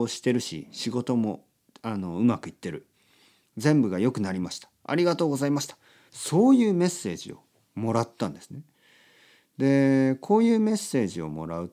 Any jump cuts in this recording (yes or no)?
no